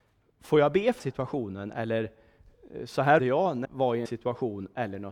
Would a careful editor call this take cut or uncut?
cut